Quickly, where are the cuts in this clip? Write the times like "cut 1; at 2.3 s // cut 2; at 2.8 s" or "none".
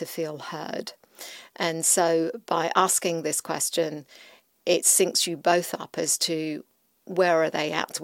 none